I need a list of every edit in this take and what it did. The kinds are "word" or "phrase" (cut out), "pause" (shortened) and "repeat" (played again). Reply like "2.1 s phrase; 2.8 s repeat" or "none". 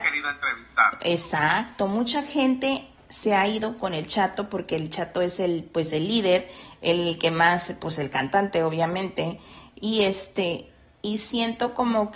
none

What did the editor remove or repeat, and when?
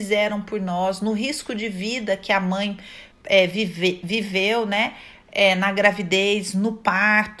3.1 s pause

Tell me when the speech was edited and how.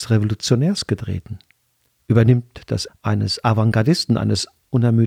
2.9 s word

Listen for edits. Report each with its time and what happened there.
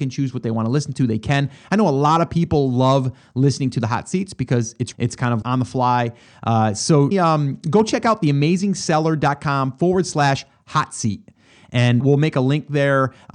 4.9 s word; 5.4 s word; 7.1 s word; 12.0 s word

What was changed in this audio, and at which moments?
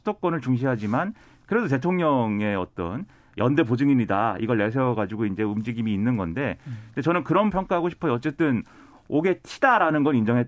7.5 s word

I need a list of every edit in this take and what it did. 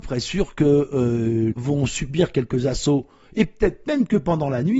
1.5 s phrase

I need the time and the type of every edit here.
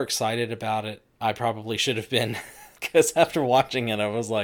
1.1 s word; 2.8 s pause

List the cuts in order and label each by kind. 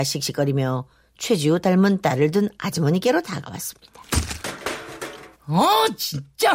5.3 s pause

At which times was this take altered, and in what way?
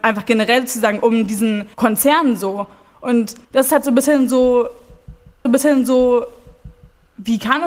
1.7 s pause; 3.4 s pause; 5.5 s repeat

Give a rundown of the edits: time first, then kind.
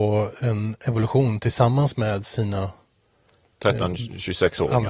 none

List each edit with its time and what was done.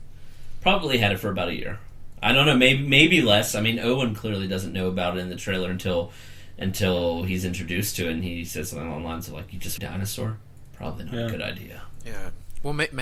9.8 s phrase

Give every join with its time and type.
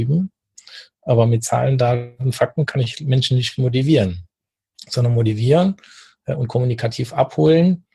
none

